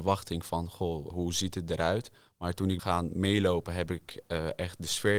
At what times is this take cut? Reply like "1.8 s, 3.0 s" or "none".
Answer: 1.1 s, 2.8 s